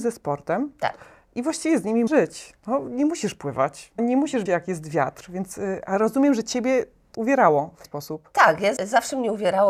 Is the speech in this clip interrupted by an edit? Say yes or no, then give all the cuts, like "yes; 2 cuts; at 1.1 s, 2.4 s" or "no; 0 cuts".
yes; 6 cuts; at 2.1 s, 4.0 s, 4.5 s, 7.1 s, 7.8 s, 8.8 s